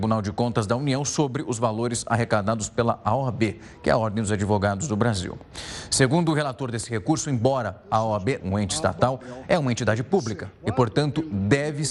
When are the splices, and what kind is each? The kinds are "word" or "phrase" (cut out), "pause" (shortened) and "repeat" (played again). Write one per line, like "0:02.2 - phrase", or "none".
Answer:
0:08.4 - phrase

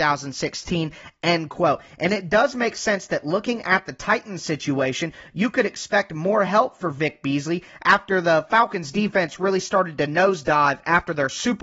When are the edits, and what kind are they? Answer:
none

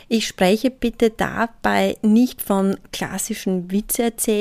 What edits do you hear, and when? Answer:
none

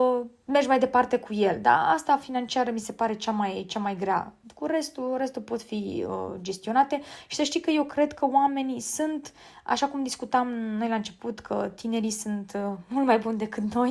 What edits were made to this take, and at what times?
none

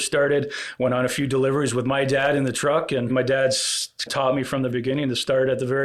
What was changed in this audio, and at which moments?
0:03.1 - phrase
0:04.1 - word
0:04.7 - word

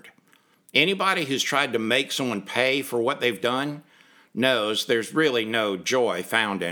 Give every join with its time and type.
none

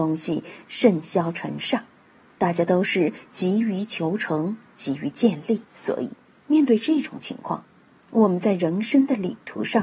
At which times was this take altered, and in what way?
0:05.7 - pause

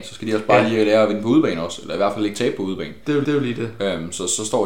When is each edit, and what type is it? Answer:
0:03.2 - repeat

